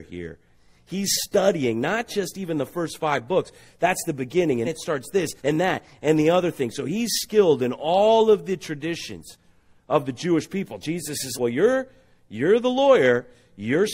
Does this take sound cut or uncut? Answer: cut